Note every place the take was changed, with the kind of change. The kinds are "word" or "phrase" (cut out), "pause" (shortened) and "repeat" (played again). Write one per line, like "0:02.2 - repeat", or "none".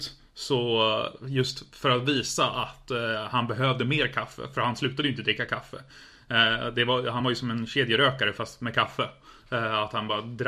none